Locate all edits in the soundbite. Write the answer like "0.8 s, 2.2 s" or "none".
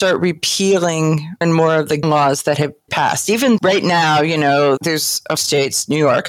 1.4 s, 2.0 s, 2.9 s, 3.6 s, 4.8 s, 5.4 s